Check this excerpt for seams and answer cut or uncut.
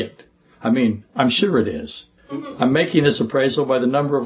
cut